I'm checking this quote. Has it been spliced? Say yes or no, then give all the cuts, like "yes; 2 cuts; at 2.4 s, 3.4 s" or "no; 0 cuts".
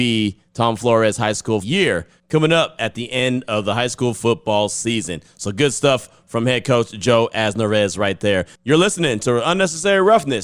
yes; 1 cut; at 1.6 s